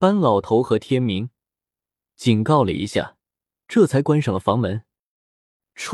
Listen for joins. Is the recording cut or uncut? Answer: uncut